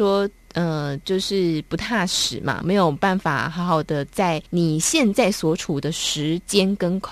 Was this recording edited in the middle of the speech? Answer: yes; 2 cuts; at 2.6 s, 4.5 s

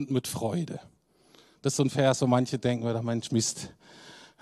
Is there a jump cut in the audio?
no; 0 cuts

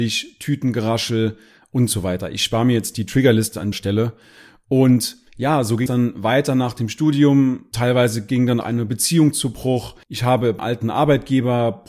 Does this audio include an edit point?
yes; 4 cuts; at 3.7 s, 5.9 s, 8.6 s, 10.6 s

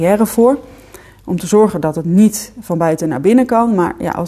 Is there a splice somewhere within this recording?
no; 0 cuts

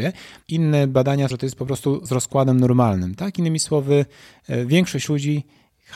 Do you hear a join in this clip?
yes; 2 cuts; at 1.3 s, 2.1 s

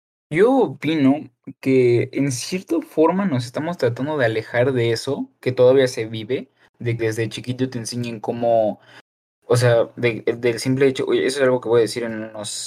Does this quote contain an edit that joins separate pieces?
yes; 1 cut; at 7.0 s

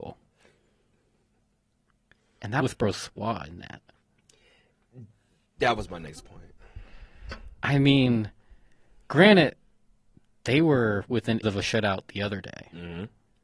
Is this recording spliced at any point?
yes; 2 cuts; at 2.6 s, 11.4 s

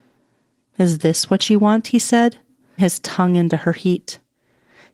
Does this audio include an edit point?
yes; 1 cut; at 2.8 s

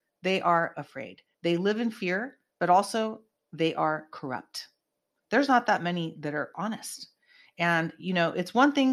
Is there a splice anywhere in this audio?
no; 0 cuts

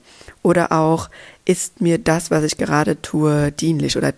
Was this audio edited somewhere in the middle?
no; 0 cuts

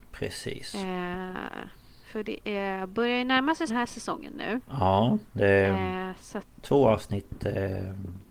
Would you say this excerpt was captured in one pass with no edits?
no; 3 cuts; at 3.7 s, 5.4 s, 6.6 s

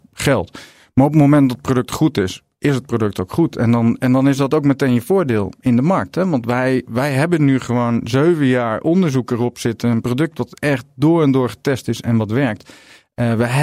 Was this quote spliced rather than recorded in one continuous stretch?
no; 0 cuts

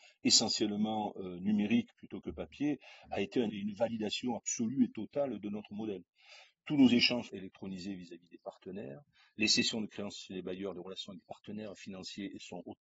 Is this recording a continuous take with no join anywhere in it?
no; 2 cuts; at 3.5 s, 7.3 s

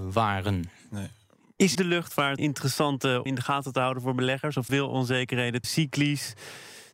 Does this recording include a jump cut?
yes; 5 cuts; at 1.7 s, 2.4 s, 3.3 s, 4.7 s, 5.6 s

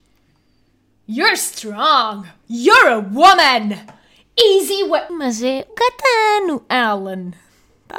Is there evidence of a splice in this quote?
yes; 2 cuts; at 5.1 s, 5.7 s

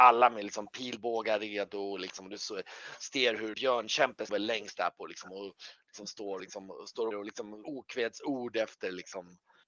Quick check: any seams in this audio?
yes; 6 cuts; at 3.5 s, 4.3 s, 4.7 s, 6.4 s, 7.1 s, 7.6 s

